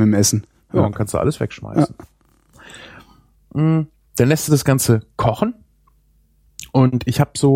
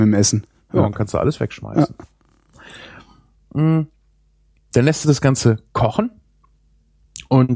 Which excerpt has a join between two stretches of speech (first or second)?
first